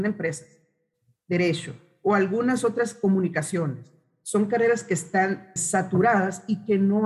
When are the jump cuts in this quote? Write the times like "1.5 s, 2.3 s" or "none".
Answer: 5.6 s